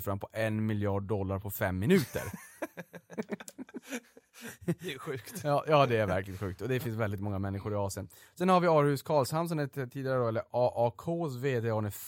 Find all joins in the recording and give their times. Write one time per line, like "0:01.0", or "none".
none